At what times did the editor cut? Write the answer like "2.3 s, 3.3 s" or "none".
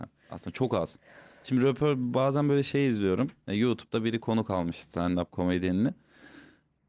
none